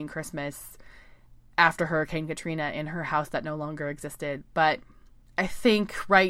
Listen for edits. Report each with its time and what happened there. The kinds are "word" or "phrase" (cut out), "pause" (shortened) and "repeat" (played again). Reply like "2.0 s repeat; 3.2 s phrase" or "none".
none